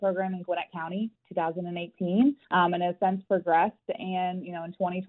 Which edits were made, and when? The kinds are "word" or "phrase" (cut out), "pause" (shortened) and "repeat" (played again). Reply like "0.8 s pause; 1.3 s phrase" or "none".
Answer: 2.4 s pause